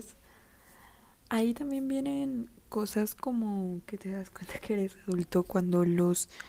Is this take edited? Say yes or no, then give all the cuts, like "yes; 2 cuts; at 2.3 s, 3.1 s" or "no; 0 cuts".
no; 0 cuts